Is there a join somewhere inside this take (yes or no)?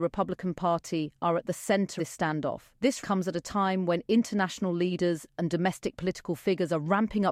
yes